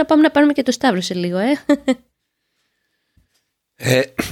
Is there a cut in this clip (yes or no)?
no